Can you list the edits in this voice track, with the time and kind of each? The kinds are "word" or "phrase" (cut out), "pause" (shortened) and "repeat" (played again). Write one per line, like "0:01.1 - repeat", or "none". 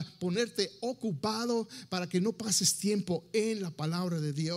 none